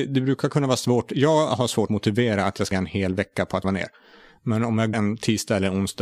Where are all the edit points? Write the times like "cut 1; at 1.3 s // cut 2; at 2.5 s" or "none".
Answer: cut 1; at 1.9 s // cut 2; at 2.7 s // cut 3; at 3.6 s // cut 4; at 4.9 s